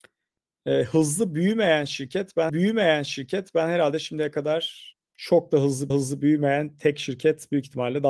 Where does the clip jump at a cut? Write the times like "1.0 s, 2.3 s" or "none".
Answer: 2.5 s, 4.9 s, 5.9 s